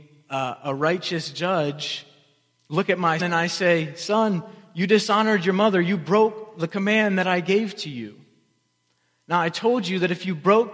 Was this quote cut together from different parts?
yes; 1 cut; at 3.2 s

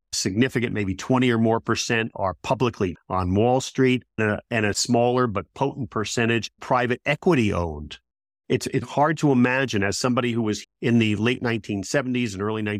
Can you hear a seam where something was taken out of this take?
yes; 6 cuts; at 2.9 s, 4.2 s, 4.7 s, 6.6 s, 8.8 s, 10.6 s

